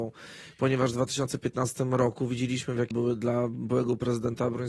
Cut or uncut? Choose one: cut